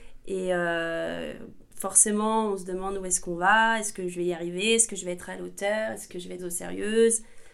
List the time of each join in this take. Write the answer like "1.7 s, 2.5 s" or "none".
1.7 s, 6.4 s